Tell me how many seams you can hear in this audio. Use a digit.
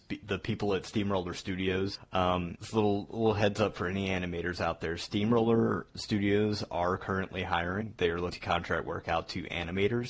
0